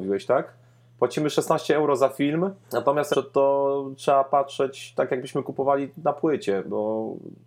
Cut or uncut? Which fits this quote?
cut